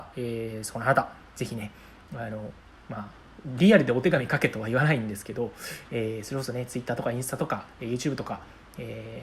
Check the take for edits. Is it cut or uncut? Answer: uncut